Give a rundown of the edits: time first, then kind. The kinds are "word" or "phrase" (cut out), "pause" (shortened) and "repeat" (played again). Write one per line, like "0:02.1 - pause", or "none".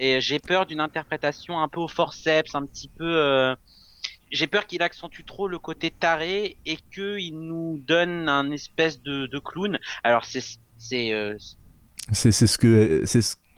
0:04.2 - pause
0:06.8 - pause